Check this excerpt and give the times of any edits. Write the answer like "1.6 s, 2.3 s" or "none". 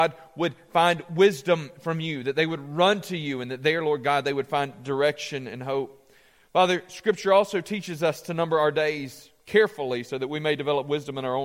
none